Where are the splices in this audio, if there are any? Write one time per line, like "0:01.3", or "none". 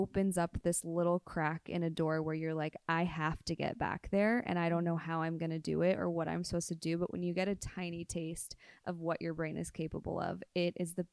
none